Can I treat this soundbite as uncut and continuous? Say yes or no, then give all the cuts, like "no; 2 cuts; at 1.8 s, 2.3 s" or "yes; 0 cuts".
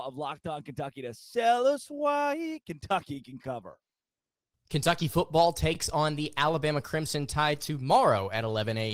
yes; 0 cuts